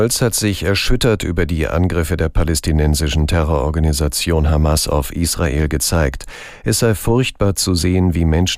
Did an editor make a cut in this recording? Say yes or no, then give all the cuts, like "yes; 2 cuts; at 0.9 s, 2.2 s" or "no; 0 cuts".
no; 0 cuts